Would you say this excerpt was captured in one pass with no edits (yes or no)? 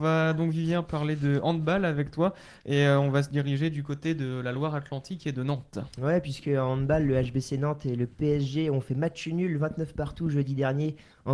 yes